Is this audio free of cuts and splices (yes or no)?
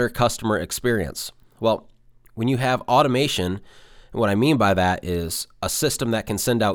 yes